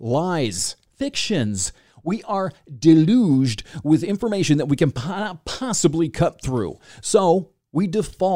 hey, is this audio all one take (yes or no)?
yes